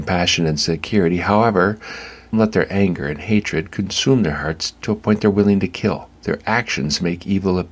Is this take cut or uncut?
cut